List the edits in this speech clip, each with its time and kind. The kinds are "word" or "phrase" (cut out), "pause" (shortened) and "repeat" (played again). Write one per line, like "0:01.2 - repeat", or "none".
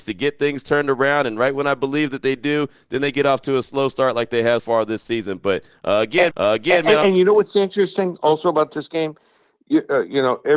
0:04.6 - word
0:06.3 - repeat